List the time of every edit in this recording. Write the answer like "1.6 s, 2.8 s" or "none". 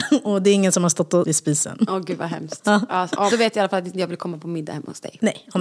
1.2 s, 3.3 s